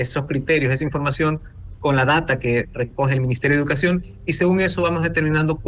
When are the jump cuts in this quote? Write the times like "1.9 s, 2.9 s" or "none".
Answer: none